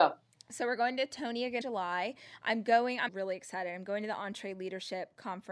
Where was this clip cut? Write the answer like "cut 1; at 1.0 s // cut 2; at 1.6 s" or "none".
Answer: cut 1; at 1.6 s // cut 2; at 3.1 s